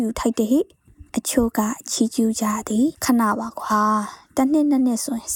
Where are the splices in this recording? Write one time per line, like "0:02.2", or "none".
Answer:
0:01.1
0:02.9